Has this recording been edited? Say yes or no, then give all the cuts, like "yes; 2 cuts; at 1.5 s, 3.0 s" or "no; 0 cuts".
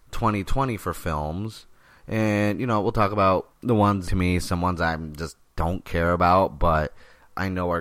yes; 2 cuts; at 3.5 s, 4.1 s